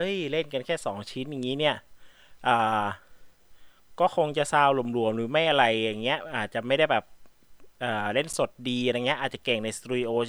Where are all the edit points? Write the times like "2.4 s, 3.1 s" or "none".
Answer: none

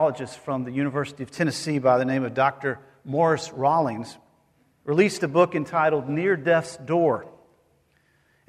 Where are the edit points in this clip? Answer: none

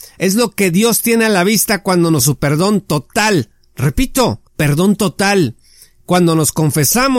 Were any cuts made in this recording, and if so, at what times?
2.2 s, 4.5 s

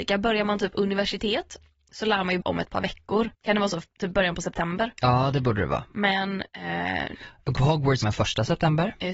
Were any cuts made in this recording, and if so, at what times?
2.4 s, 3.3 s, 6.5 s, 7.6 s, 8.0 s

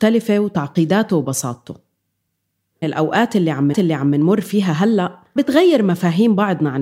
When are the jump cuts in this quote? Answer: 2.8 s, 3.7 s, 5.4 s

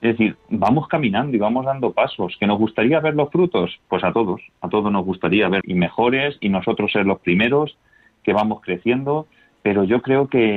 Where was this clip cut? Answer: 5.6 s

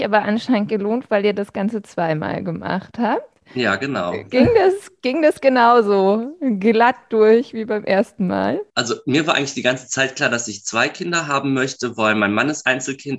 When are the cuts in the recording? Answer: 8.7 s

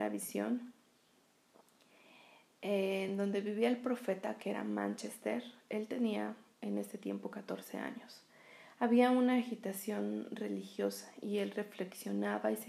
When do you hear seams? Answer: none

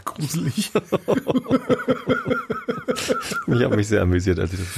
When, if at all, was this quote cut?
none

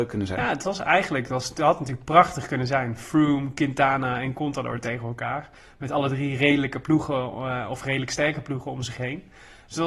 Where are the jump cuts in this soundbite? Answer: none

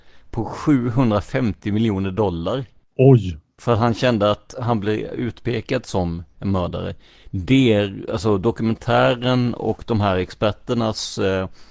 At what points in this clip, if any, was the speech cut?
2.8 s

